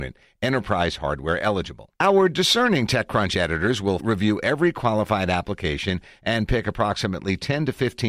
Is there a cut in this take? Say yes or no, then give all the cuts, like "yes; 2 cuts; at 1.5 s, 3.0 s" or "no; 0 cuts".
yes; 2 cuts; at 1.9 s, 4.0 s